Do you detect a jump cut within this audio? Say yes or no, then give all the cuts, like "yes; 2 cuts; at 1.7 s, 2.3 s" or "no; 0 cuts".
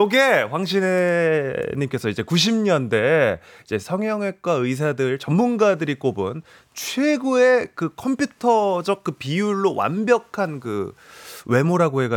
no; 0 cuts